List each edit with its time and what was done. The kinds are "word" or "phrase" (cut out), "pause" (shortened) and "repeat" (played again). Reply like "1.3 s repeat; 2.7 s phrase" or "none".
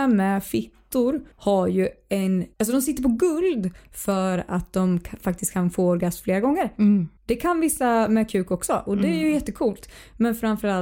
1.3 s pause; 2.5 s pause; 7.2 s pause